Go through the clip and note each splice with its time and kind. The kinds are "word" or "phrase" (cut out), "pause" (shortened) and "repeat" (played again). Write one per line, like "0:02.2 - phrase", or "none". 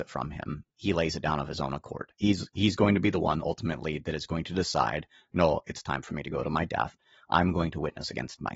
none